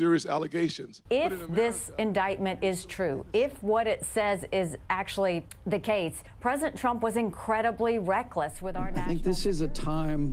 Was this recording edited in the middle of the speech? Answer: no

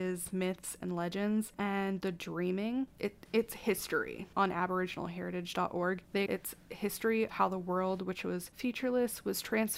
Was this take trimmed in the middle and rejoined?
yes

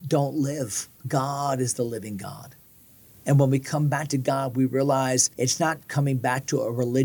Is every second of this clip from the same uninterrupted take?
no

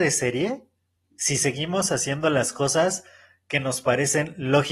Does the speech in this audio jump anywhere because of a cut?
no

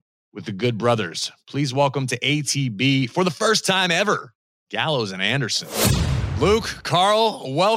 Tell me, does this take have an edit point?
no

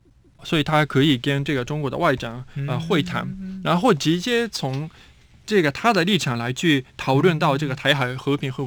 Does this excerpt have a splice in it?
no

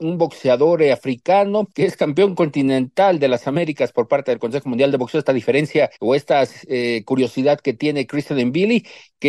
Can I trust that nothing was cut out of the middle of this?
no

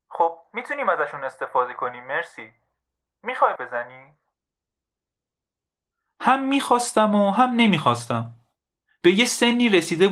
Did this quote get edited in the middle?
yes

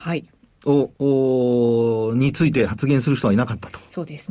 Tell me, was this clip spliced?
no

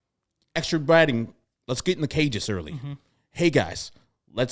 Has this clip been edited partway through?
no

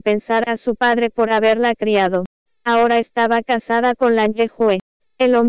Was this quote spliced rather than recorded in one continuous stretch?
no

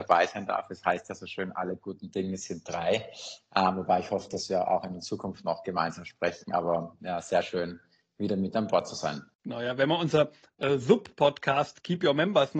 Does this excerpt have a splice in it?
yes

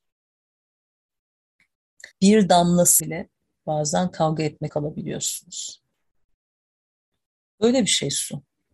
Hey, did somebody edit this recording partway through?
yes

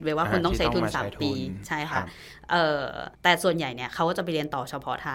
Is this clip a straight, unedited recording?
no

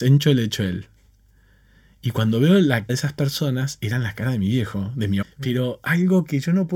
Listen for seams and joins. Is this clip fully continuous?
no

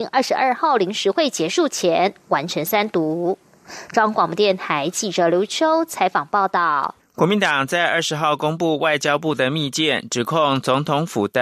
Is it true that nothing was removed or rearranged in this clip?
no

